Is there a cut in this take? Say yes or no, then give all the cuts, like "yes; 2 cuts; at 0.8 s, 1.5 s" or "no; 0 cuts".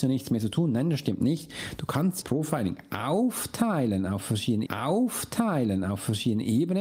yes; 2 cuts; at 2.2 s, 4.7 s